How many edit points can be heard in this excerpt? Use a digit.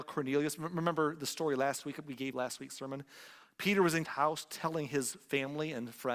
2